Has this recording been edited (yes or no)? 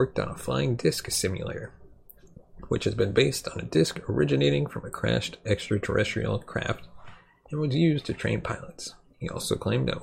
no